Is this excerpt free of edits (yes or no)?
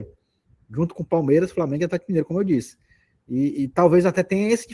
yes